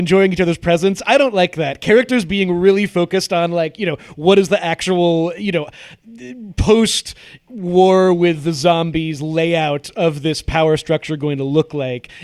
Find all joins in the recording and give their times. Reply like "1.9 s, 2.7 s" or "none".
none